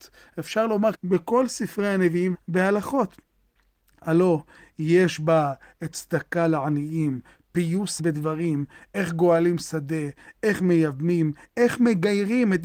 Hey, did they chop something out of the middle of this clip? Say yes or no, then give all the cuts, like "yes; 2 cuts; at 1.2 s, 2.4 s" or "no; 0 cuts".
yes; 4 cuts; at 0.9 s, 2.3 s, 5.9 s, 8.0 s